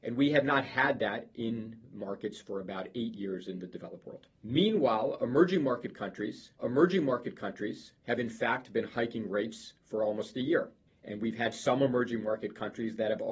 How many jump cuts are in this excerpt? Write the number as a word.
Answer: three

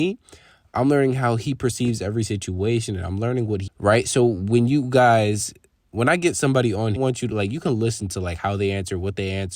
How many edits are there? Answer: two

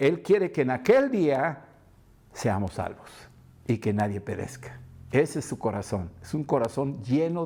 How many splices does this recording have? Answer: zero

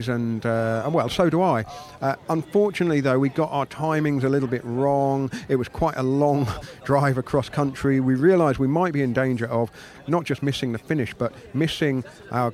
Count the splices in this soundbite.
zero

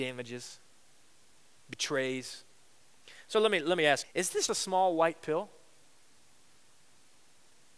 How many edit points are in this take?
two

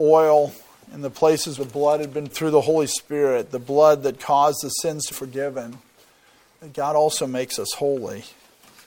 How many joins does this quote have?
three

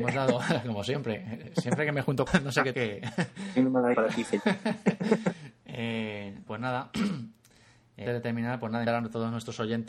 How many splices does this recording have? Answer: six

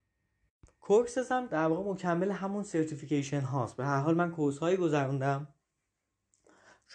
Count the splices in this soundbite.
one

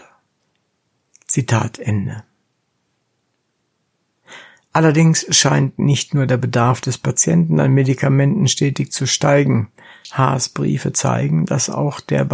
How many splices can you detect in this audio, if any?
zero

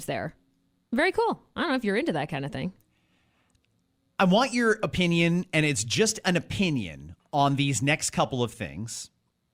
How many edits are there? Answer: zero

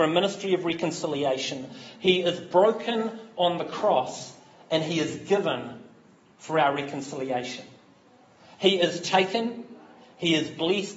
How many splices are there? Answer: zero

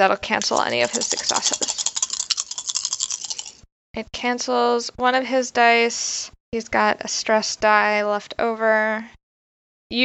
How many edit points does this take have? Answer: one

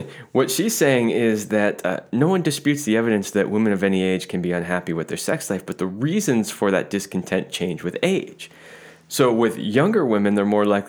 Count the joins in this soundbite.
zero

